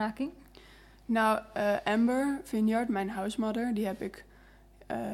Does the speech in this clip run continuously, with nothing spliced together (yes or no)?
yes